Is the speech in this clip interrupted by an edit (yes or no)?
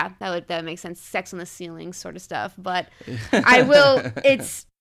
no